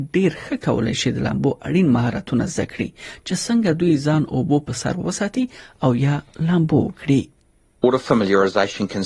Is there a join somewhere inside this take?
no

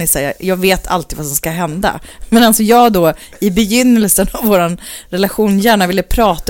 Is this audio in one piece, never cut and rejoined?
yes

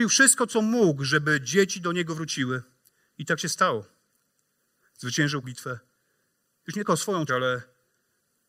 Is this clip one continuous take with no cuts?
no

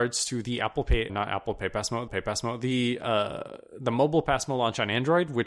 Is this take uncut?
no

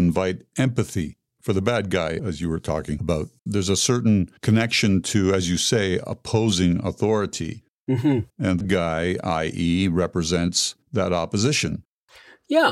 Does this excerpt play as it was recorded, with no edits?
no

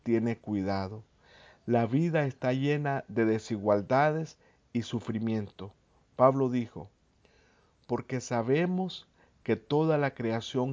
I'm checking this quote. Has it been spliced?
no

